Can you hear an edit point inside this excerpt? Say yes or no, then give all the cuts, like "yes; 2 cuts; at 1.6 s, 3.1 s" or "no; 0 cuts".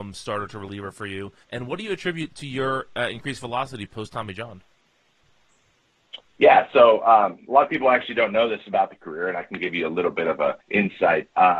yes; 2 cuts; at 1.4 s, 10.6 s